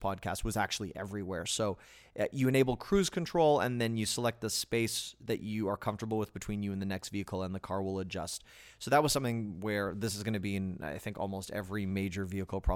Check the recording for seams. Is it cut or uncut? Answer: uncut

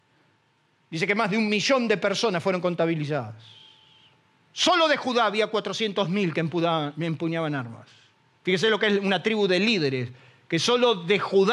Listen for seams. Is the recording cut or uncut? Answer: uncut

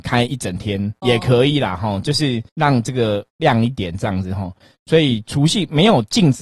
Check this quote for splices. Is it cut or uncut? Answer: cut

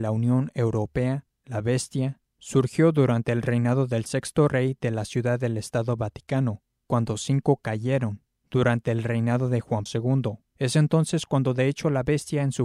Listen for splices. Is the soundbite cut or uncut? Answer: cut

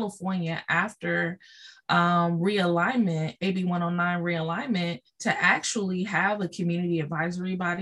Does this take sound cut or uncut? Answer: cut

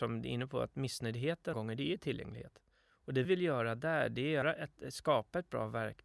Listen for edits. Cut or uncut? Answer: cut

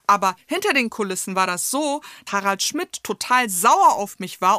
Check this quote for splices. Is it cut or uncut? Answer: cut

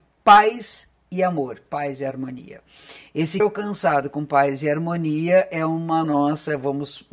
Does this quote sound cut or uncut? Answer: cut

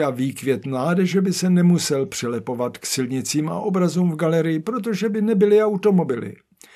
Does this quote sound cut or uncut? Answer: uncut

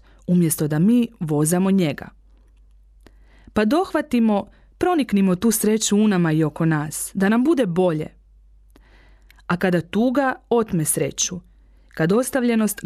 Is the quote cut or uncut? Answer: uncut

